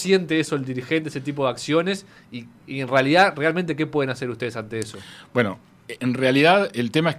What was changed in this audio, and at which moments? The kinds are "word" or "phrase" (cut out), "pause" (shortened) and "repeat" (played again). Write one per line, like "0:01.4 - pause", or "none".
0:06.0 - word